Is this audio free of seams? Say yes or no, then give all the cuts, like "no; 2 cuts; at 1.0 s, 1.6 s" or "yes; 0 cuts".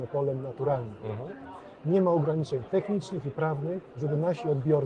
yes; 0 cuts